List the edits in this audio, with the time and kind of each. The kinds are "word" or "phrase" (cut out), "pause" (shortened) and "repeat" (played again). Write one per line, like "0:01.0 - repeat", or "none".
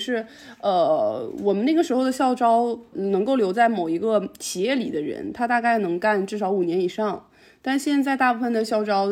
0:02.9 - word